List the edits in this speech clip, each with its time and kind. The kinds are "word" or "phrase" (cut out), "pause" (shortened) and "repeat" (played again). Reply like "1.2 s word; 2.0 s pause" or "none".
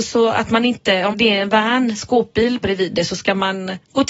1.1 s word; 2.6 s word